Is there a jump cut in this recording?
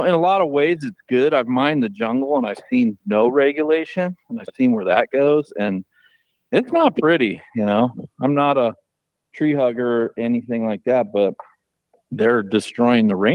no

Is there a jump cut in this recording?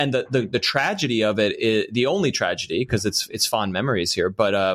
no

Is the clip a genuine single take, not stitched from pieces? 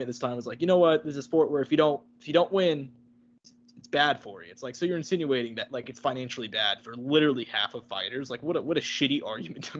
yes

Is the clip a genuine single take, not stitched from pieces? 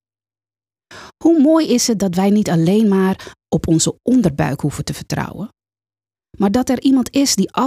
yes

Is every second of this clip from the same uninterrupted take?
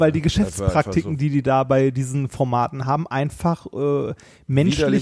yes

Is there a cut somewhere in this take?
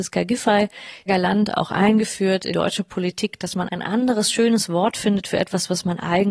yes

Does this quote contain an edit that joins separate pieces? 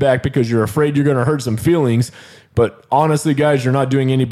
no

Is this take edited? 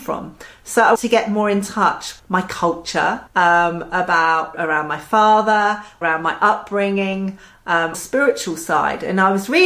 yes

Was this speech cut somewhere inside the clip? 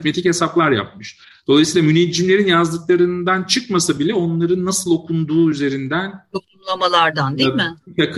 no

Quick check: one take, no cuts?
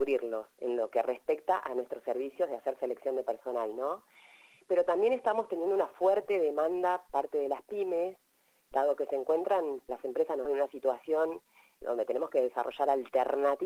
no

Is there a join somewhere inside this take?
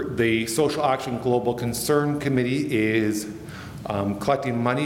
no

